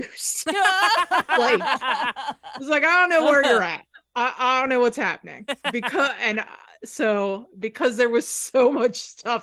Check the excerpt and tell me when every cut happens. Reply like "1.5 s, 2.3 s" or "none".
none